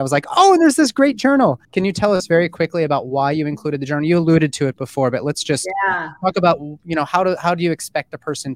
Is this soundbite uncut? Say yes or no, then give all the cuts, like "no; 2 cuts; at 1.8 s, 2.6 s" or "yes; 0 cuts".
no; 1 cut; at 1.6 s